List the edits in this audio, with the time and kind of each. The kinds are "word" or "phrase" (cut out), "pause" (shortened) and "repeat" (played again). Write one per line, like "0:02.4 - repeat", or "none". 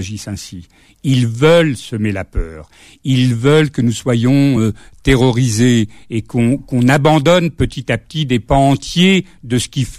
none